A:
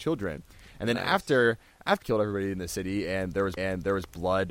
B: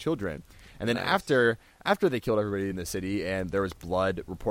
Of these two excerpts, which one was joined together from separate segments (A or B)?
A